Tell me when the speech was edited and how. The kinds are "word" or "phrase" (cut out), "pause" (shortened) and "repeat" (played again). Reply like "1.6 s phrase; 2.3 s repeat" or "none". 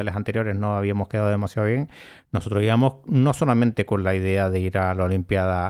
none